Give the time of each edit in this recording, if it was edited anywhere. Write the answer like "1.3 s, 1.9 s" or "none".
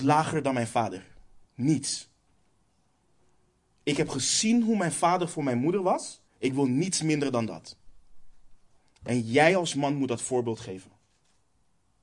1.4 s, 6.3 s, 8.8 s